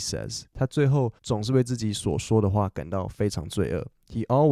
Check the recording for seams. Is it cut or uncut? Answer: cut